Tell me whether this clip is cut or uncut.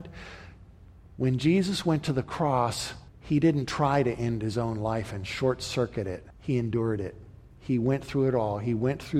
cut